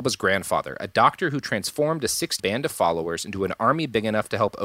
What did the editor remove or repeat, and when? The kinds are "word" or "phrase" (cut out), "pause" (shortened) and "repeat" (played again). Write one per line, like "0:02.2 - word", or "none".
0:02.4 - word